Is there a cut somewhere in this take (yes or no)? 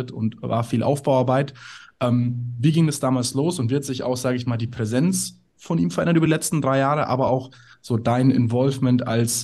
no